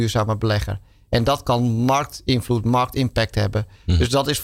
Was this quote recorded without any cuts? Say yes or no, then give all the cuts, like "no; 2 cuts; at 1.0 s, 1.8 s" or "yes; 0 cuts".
yes; 0 cuts